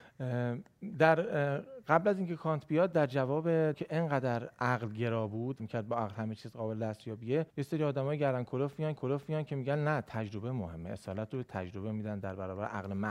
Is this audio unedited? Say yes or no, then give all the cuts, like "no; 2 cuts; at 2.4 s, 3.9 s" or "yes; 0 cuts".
no; 4 cuts; at 3.7 s, 5.6 s, 7.5 s, 9.0 s